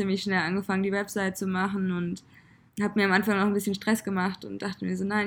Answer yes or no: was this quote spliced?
yes